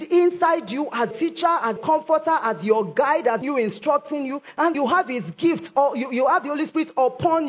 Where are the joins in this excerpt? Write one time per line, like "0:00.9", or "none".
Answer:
0:01.1
0:01.8
0:03.4
0:04.7